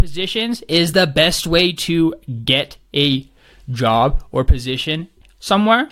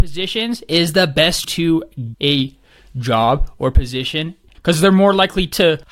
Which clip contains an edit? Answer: second; 3 cuts; at 1.4 s, 2.1 s, 4.5 s

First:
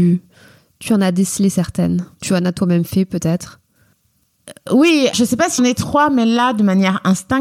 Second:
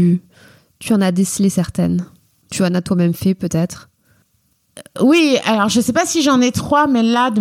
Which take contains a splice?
first; 3 cuts; at 2.1 s, 5.1 s, 5.6 s

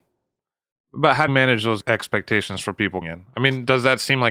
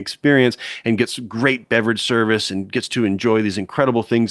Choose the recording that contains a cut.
first; 2 cuts; at 1.3 s, 3.0 s

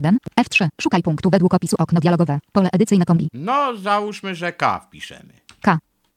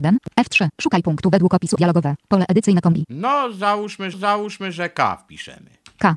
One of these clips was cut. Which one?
second; 2 cuts; at 1.8 s, 4.1 s

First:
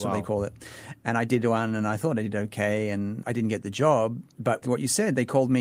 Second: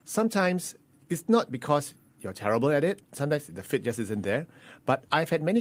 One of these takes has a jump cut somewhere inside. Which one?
first; 2 cuts; at 3.2 s, 4.6 s

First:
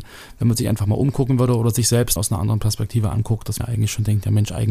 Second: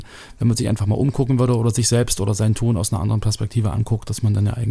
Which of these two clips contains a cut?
first; 2 cuts; at 2.2 s, 3.6 s

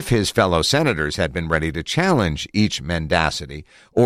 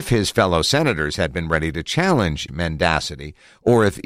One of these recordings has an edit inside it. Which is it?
second; 1 cut; at 2.5 s

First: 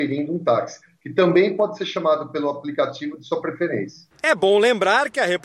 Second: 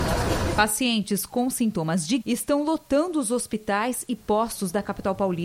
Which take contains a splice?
second; 1 cut; at 2.2 s

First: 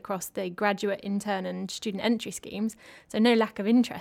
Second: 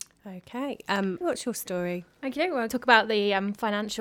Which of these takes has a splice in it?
second; 2 cuts; at 1.2 s, 2.7 s

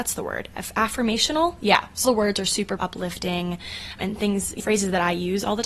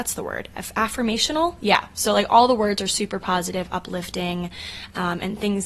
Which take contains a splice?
first; 4 cuts; at 2.0 s, 2.8 s, 4.0 s, 4.6 s

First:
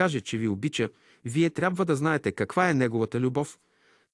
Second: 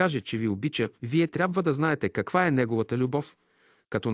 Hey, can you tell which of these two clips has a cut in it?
second; 1 cut; at 0.9 s

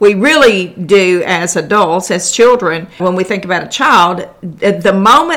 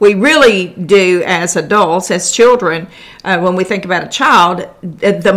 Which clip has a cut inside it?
first; 1 cut; at 3.0 s

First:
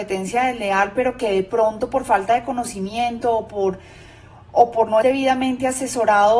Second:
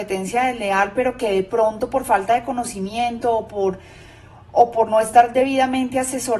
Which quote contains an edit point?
first; 1 cut; at 5.0 s

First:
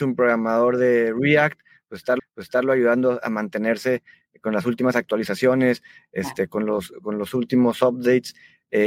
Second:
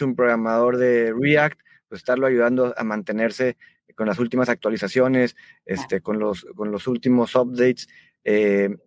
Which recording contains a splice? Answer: first; 1 cut; at 2.2 s

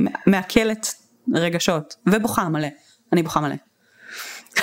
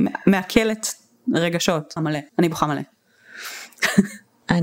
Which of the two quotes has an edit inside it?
second; 2 cuts; at 2.0 s, 2.3 s

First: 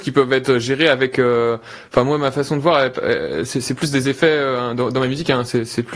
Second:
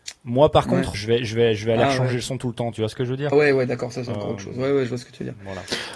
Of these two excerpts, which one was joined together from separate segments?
second; 2 cuts; at 0.9 s, 3.3 s

